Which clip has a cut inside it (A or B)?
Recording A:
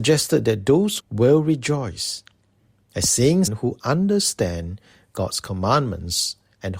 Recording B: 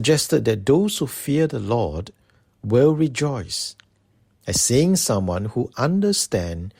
A